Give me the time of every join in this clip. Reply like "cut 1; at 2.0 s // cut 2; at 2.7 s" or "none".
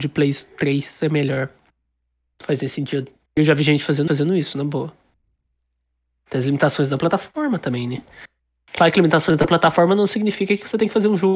cut 1; at 3.3 s // cut 2; at 4.1 s